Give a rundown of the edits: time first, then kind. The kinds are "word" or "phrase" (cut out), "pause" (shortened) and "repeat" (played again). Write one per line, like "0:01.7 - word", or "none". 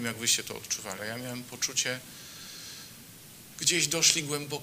0:01.0 - word
0:03.5 - word